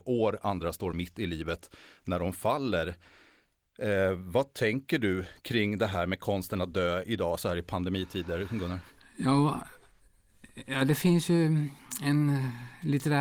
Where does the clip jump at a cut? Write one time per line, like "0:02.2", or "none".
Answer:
none